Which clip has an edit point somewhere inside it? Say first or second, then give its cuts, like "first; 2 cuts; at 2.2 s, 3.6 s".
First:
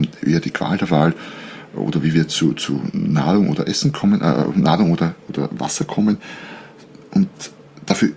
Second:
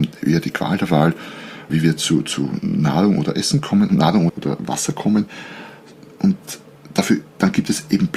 second; 3 cuts; at 1.7 s, 3.9 s, 4.3 s